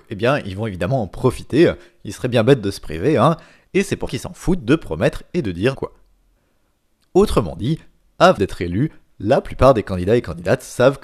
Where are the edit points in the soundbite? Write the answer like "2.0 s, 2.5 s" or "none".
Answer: 4.1 s, 5.7 s, 8.4 s

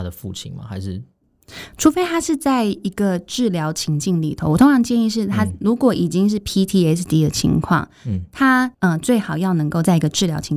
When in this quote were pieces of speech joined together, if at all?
8.7 s

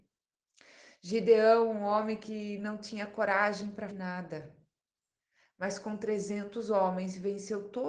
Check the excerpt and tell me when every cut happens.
3.9 s

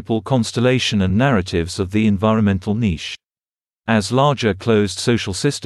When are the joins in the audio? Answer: none

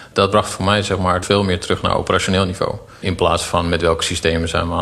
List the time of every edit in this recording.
1.2 s

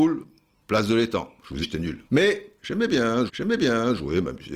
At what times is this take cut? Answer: 1.6 s, 2.1 s, 3.3 s

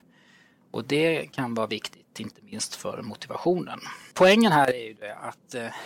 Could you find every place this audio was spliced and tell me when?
4.1 s

